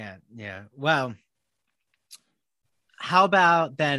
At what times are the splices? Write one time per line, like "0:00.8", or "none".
none